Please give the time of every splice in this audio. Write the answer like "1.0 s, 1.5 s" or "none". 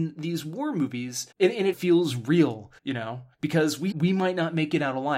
1.3 s, 1.7 s, 2.8 s, 3.3 s, 3.9 s